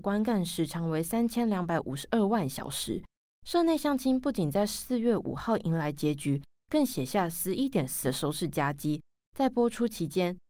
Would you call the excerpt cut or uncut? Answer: cut